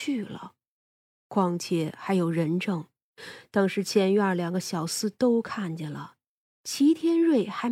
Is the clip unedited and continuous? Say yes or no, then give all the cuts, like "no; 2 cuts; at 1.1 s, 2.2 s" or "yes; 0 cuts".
yes; 0 cuts